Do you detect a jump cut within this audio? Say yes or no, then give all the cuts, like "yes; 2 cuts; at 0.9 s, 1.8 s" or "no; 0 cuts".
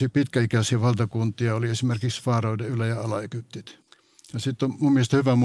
no; 0 cuts